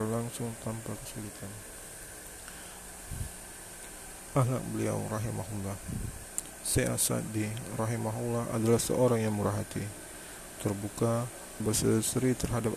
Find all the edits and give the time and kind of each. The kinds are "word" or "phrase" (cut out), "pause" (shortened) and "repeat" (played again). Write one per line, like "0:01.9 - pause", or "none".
0:11.6 - word